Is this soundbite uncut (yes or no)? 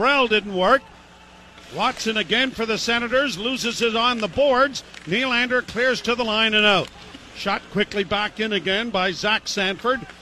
yes